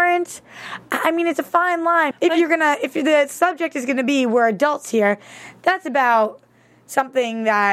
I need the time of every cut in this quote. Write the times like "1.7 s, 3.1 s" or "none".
2.1 s